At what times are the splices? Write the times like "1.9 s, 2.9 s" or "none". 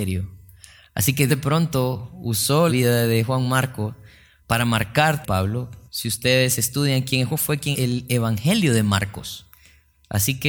1.3 s, 2.7 s, 4.4 s, 5.2 s, 5.9 s, 7.3 s, 7.7 s